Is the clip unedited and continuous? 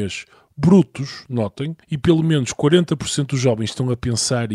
no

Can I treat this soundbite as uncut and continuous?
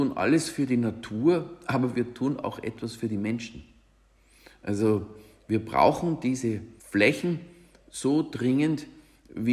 yes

